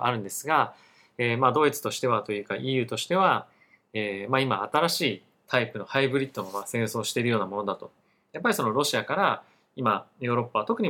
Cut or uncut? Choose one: uncut